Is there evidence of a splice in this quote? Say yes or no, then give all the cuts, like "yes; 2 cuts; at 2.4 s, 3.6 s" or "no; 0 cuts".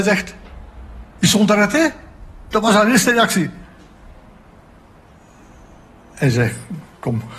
no; 0 cuts